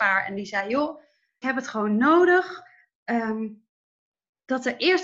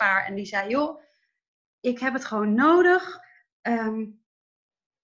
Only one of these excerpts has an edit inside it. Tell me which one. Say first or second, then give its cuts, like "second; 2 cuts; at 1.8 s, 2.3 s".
first; 1 cut; at 1.4 s